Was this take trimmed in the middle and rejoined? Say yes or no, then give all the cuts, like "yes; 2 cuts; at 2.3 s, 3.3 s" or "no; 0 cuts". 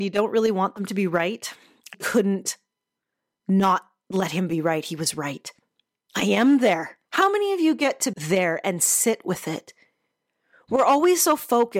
yes; 3 cuts; at 1.9 s, 7.0 s, 8.1 s